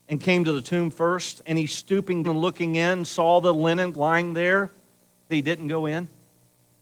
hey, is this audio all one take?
no; 3 cuts; at 2.2 s, 3.9 s, 5.3 s

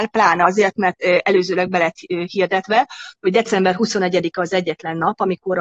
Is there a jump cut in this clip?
no; 0 cuts

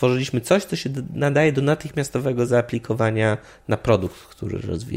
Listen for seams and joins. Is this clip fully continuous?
yes; 0 cuts

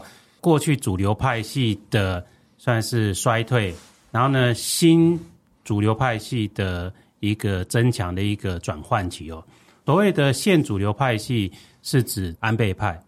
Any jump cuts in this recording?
no; 0 cuts

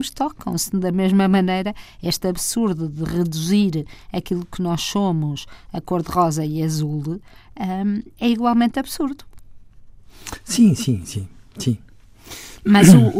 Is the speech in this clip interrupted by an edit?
no; 0 cuts

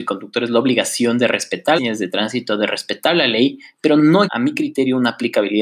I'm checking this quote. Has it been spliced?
yes; 2 cuts; at 1.8 s, 4.3 s

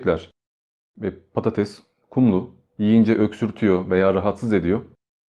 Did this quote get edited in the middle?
no; 0 cuts

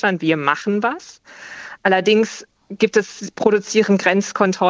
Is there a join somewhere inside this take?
no; 0 cuts

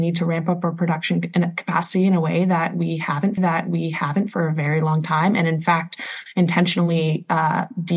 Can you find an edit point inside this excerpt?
yes; 1 cut; at 3.4 s

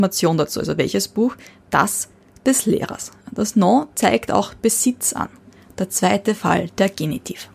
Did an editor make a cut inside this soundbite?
no; 0 cuts

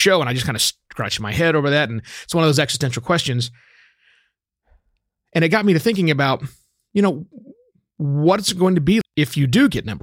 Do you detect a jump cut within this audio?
yes; 1 cut; at 9.0 s

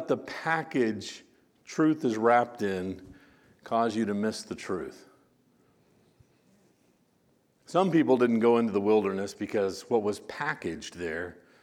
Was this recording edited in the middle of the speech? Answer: no; 0 cuts

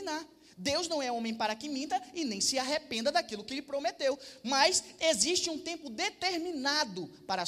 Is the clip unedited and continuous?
yes; 0 cuts

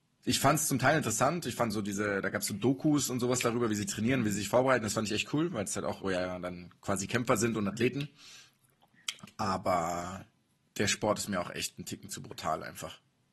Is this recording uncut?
no; 1 cut; at 6.0 s

